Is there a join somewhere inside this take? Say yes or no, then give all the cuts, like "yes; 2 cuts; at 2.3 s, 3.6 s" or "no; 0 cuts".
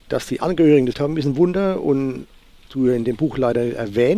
yes; 2 cuts; at 0.9 s, 2.6 s